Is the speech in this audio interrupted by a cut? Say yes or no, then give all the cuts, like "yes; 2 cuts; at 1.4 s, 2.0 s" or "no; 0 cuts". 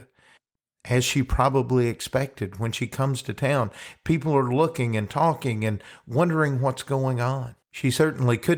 yes; 1 cut; at 7.6 s